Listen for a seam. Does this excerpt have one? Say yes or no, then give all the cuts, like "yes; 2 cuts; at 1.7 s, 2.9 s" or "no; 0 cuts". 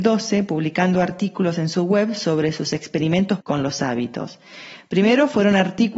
yes; 1 cut; at 3.4 s